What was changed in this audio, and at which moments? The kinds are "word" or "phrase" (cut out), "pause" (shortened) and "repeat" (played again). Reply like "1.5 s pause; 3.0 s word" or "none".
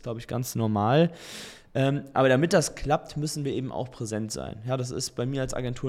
none